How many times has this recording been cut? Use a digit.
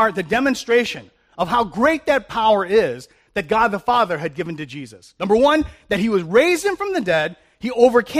0